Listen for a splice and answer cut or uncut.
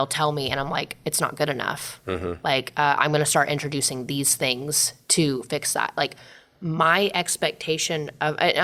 uncut